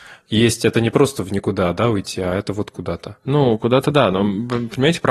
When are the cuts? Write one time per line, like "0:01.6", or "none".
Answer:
none